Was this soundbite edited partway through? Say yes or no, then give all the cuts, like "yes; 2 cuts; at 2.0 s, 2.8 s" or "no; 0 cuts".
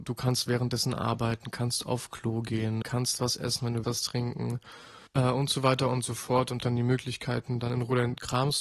yes; 5 cuts; at 2.8 s, 3.8 s, 5.1 s, 6.6 s, 7.6 s